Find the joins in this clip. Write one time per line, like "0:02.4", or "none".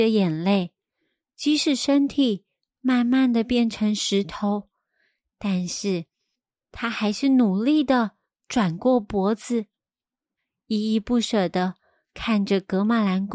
none